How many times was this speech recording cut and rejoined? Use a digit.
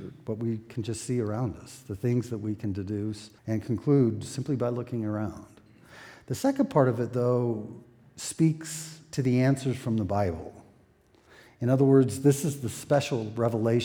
1